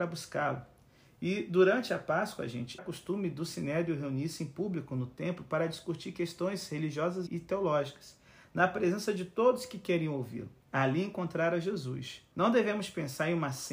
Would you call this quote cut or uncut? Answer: cut